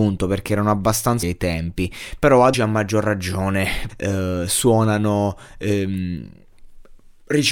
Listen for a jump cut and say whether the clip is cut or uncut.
cut